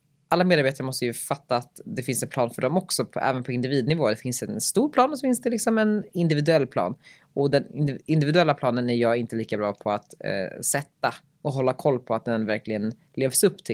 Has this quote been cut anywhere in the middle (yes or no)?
no